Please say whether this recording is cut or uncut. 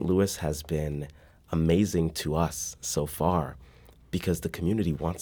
uncut